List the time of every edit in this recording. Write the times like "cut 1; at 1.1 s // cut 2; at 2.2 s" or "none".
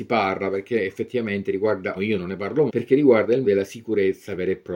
cut 1; at 2.0 s // cut 2; at 2.7 s // cut 3; at 3.4 s